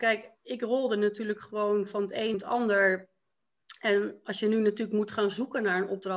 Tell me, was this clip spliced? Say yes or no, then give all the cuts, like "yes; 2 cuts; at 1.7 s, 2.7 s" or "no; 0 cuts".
yes; 1 cut; at 2.3 s